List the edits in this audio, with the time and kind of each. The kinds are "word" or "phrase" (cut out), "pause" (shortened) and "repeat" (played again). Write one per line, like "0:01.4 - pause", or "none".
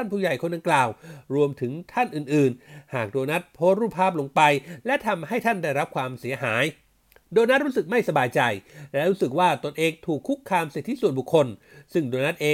none